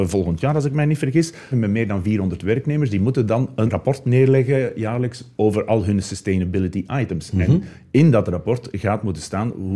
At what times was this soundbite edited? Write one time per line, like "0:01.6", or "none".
0:01.5
0:03.7
0:05.3